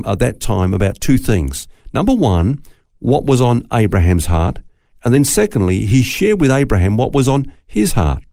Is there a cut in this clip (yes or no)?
no